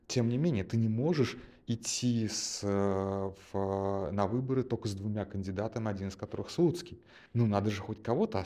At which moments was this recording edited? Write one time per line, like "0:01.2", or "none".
0:07.3